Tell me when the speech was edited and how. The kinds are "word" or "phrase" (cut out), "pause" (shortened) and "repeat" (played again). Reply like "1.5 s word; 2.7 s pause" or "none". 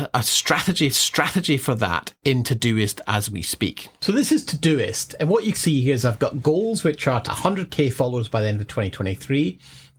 0.9 s repeat; 5.5 s word; 7.2 s word